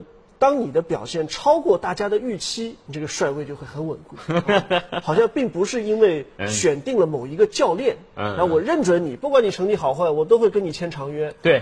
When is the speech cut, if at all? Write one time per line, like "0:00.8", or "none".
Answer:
0:02.9